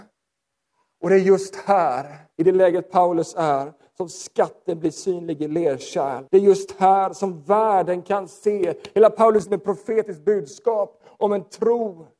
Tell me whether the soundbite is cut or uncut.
cut